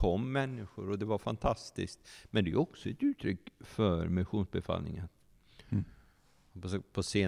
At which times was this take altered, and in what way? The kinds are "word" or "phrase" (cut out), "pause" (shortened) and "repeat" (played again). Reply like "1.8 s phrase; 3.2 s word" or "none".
none